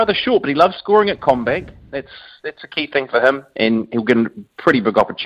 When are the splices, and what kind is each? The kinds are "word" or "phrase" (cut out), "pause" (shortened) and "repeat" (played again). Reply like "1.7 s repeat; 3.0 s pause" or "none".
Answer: none